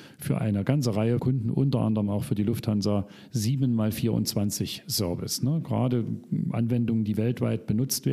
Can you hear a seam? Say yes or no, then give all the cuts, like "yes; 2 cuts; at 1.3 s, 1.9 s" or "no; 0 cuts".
yes; 1 cut; at 1.2 s